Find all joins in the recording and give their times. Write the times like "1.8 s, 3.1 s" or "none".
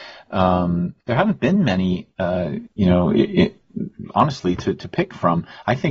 1.0 s